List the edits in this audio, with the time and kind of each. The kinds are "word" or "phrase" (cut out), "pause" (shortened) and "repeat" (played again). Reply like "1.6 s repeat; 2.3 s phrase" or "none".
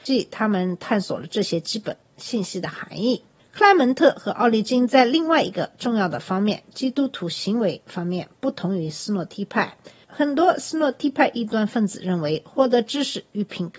none